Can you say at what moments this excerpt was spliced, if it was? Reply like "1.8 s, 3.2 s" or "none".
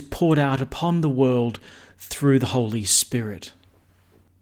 none